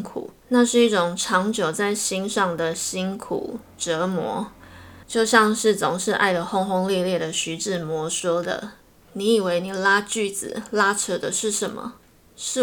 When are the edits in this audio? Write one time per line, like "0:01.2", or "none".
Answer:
0:08.8